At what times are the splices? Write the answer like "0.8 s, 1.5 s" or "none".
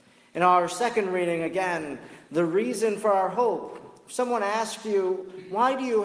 none